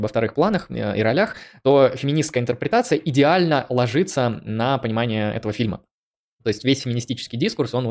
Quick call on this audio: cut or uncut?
uncut